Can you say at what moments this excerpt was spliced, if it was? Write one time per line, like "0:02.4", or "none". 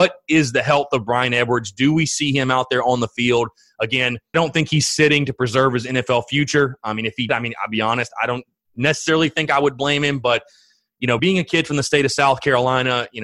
0:04.3
0:07.3
0:11.2